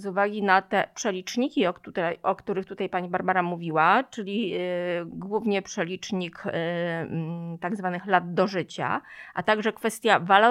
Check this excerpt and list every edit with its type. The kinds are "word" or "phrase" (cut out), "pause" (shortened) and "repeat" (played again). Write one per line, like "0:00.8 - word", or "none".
none